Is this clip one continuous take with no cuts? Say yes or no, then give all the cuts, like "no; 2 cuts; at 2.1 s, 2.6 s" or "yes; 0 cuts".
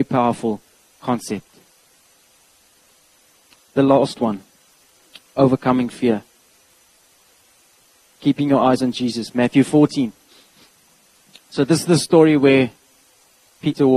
yes; 0 cuts